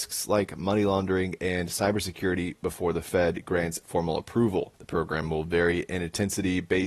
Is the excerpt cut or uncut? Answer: uncut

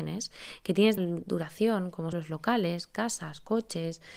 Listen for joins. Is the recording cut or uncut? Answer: cut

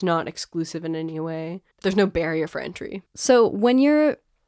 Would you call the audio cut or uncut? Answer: cut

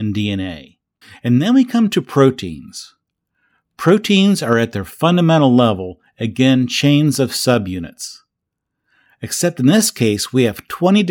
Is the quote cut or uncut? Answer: cut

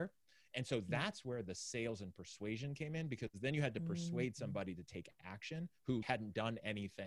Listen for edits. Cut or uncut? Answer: cut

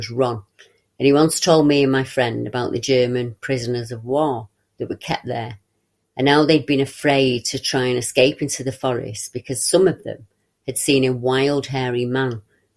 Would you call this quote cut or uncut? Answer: uncut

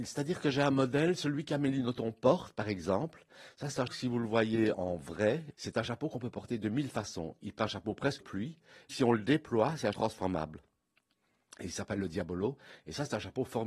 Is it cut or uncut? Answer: cut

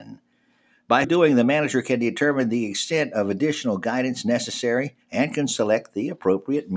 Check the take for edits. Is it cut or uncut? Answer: cut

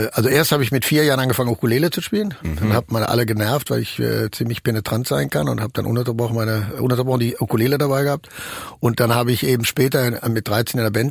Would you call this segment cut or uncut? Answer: uncut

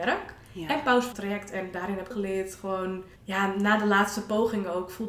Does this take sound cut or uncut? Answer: cut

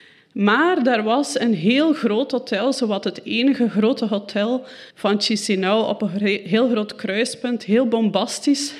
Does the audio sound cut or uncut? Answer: cut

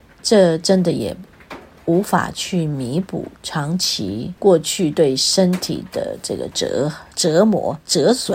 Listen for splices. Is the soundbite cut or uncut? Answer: cut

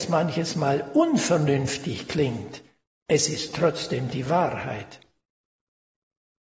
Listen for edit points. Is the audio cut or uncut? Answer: uncut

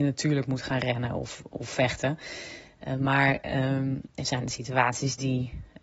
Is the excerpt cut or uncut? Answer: cut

